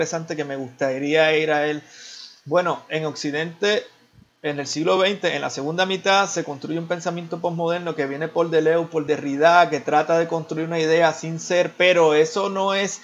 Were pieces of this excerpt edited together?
no; 0 cuts

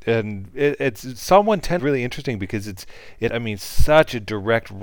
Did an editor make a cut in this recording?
yes; 2 cuts; at 1.8 s, 3.3 s

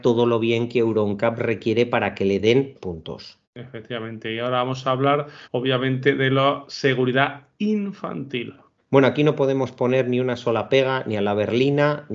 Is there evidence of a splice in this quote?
yes; 4 cuts; at 2.7 s, 3.4 s, 5.4 s, 8.8 s

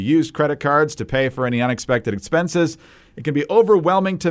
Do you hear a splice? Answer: no; 0 cuts

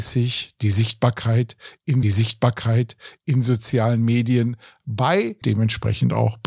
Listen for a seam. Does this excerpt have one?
yes; 2 cuts; at 2.0 s, 5.4 s

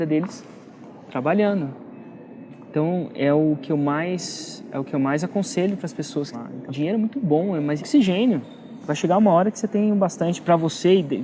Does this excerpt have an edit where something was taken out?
yes; 3 cuts; at 6.3 s, 6.7 s, 7.8 s

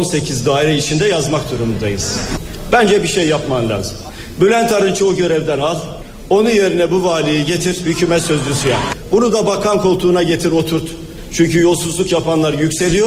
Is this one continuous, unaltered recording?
yes; 0 cuts

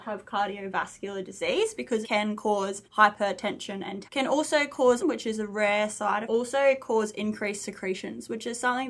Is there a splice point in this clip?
yes; 5 cuts; at 2.0 s, 2.8 s, 4.1 s, 5.0 s, 6.2 s

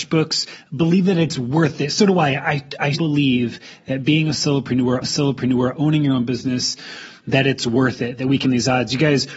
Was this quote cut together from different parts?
yes; 3 cuts; at 2.9 s, 5.0 s, 8.4 s

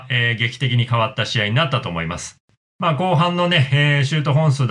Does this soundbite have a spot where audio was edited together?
no; 0 cuts

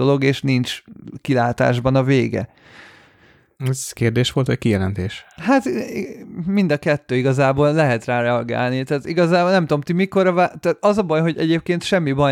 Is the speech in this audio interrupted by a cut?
no; 0 cuts

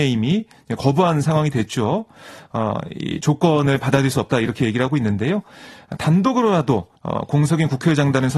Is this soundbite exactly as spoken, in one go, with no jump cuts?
no; 1 cut; at 6.9 s

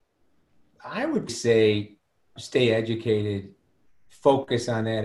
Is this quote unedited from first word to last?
no; 2 cuts; at 1.3 s, 2.4 s

